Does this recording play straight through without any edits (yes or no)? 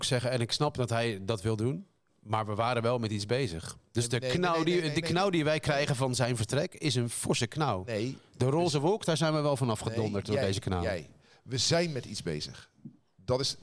yes